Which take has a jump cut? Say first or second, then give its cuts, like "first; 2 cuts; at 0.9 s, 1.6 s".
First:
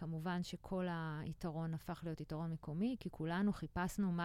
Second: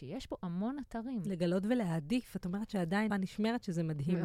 second; 1 cut; at 3.1 s